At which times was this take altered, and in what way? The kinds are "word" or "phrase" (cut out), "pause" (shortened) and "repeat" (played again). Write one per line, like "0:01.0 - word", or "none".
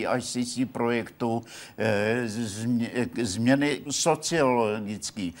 0:03.9 - word